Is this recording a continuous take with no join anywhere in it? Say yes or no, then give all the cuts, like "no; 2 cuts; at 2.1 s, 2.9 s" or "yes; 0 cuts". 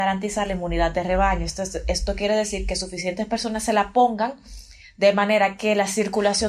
yes; 0 cuts